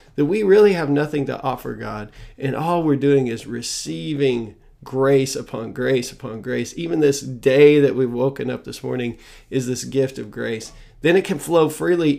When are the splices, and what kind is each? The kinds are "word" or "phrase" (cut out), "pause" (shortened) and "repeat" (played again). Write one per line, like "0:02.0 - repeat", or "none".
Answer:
none